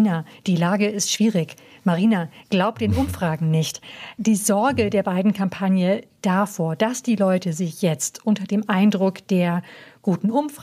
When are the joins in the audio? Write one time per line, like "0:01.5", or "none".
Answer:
none

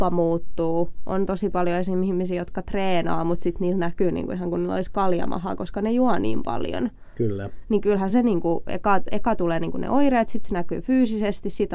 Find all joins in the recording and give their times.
none

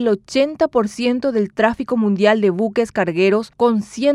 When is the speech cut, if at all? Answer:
none

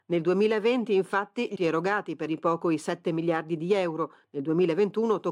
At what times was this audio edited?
0:01.6
0:02.3

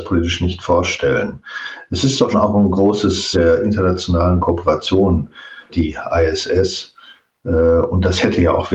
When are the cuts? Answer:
0:02.3
0:03.3
0:04.4
0:05.7

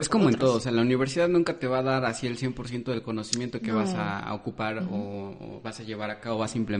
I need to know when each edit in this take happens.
none

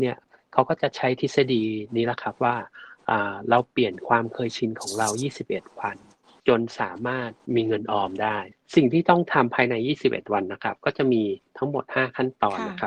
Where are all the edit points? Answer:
none

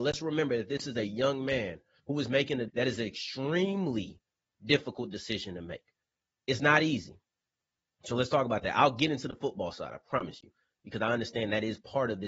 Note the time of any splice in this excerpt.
0:02.7

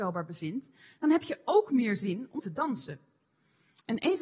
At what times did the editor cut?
0:02.4

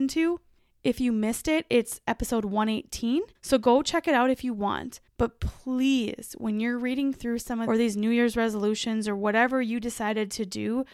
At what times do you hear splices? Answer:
0:03.4
0:05.1
0:07.7

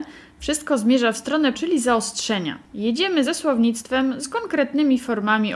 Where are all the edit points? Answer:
0:01.5
0:03.2
0:04.2

